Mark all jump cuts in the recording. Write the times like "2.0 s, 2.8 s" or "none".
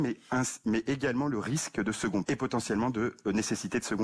2.2 s